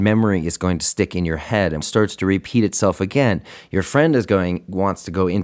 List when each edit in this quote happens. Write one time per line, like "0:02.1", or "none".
0:01.8